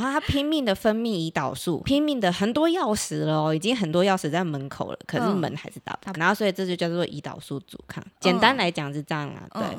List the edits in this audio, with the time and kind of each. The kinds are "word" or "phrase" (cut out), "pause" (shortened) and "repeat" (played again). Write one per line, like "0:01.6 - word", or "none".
0:01.8 - word
0:06.2 - phrase